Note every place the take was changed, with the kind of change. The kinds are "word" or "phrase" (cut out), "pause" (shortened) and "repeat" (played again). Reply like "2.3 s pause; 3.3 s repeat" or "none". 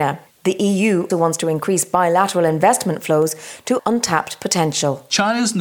1.1 s word; 3.8 s word